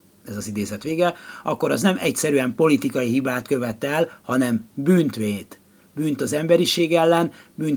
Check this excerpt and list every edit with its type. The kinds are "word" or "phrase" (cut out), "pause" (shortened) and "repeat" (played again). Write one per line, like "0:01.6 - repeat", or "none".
none